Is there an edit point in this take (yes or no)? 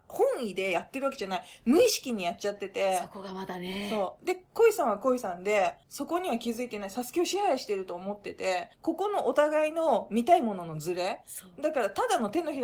yes